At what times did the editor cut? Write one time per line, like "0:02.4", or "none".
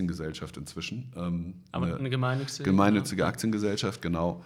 none